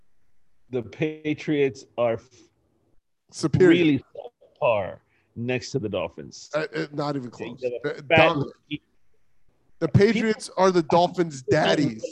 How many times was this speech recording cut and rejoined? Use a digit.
0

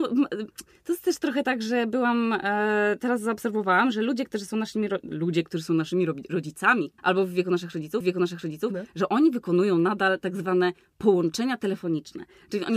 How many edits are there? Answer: 2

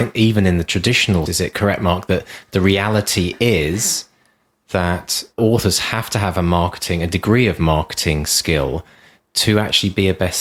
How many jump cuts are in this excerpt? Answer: 2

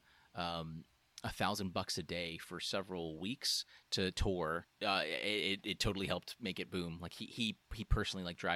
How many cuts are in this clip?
0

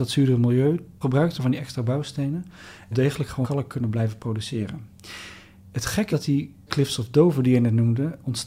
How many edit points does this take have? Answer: 6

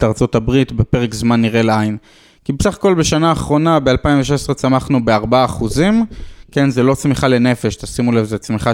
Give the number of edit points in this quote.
0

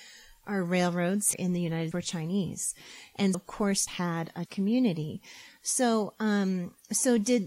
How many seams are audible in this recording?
5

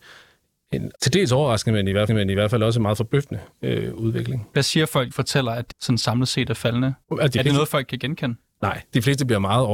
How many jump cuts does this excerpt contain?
5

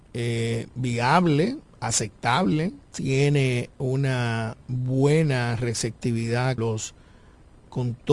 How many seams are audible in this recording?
3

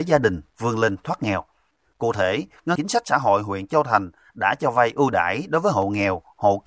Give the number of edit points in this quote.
1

